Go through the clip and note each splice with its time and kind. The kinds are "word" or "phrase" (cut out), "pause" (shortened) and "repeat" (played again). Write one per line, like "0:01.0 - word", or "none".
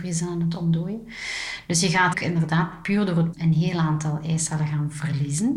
0:02.1 - word
0:03.3 - word